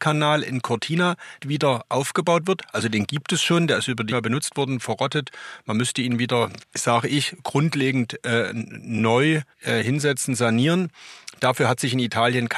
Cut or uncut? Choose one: cut